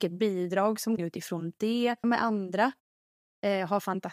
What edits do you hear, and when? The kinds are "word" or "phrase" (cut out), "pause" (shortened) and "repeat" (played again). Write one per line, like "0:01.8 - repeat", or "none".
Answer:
0:01.0 - phrase
0:02.0 - word